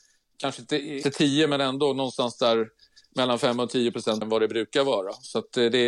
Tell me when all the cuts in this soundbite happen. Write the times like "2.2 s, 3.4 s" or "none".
1.0 s, 4.2 s